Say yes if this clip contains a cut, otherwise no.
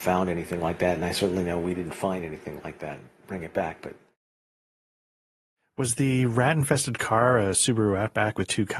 no